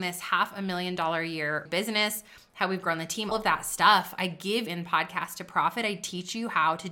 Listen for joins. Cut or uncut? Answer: cut